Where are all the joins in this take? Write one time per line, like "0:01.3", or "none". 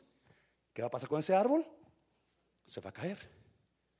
none